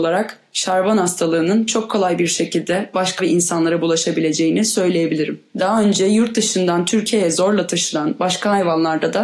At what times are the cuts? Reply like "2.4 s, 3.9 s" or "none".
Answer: 3.2 s